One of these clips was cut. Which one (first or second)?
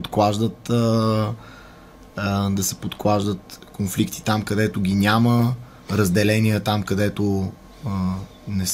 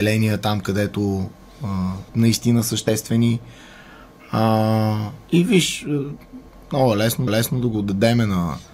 second